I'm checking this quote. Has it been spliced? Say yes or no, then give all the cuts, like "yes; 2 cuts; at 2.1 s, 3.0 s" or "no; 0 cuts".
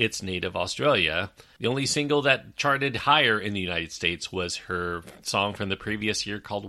no; 0 cuts